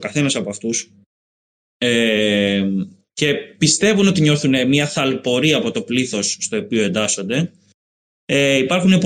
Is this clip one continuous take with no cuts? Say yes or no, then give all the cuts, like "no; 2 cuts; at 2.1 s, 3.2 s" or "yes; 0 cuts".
yes; 0 cuts